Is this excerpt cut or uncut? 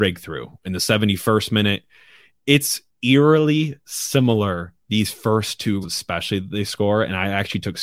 cut